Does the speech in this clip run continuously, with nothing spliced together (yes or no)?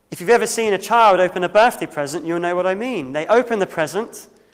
yes